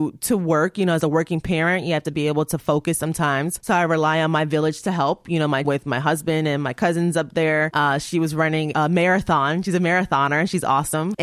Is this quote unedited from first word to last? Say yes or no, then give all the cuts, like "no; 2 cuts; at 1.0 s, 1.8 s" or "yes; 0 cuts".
no; 2 cuts; at 5.6 s, 8.7 s